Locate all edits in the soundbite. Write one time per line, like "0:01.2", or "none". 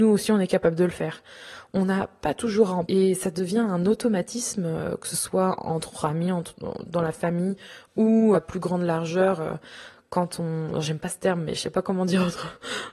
0:02.9
0:08.3

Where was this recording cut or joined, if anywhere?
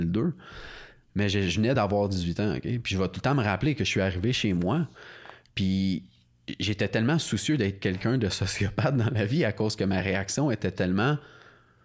none

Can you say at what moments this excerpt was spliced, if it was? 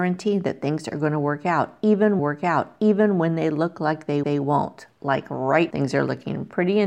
0:02.2
0:04.2
0:05.7

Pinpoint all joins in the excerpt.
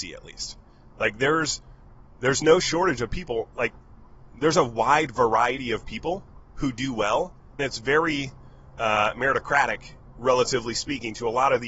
0:07.6

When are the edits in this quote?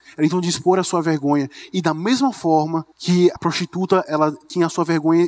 0:02.9
0:03.4
0:04.0

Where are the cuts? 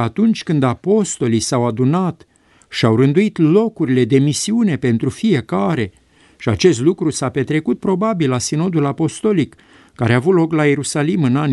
none

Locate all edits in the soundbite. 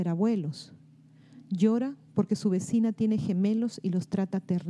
none

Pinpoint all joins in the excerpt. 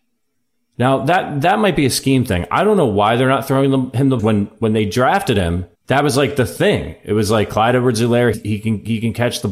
0:04.2
0:05.7
0:08.3

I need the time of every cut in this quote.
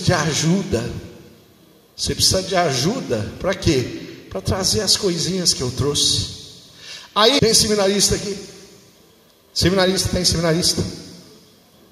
0:07.4

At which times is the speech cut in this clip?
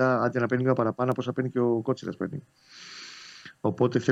none

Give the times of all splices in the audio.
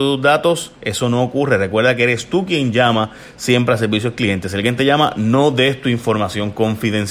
none

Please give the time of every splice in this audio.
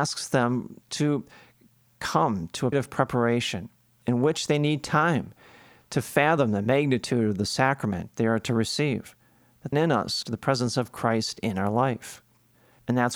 0:02.7
0:09.7
0:10.2

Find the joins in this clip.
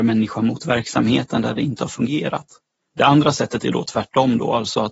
none

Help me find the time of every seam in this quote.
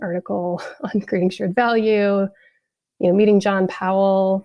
none

